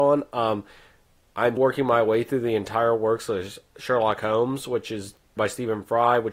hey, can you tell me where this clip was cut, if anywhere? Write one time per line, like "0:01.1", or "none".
0:01.6
0:05.4